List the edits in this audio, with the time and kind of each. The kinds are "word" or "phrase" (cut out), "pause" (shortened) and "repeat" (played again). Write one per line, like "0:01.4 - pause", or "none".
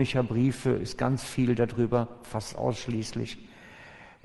none